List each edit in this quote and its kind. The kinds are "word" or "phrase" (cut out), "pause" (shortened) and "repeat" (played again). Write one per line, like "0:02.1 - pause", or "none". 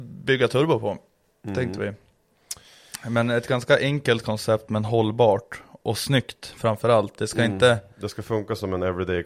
none